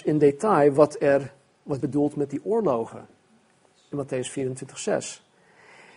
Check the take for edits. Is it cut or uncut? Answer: cut